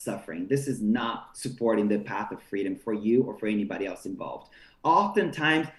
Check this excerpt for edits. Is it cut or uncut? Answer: uncut